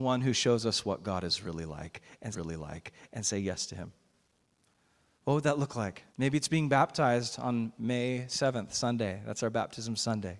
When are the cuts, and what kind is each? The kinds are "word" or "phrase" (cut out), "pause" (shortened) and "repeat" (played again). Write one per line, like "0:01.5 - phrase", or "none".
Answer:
0:02.3 - repeat
0:06.1 - pause